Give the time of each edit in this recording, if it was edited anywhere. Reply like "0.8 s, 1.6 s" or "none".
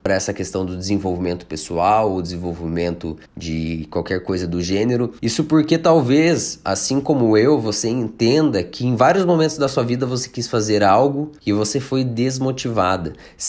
3.3 s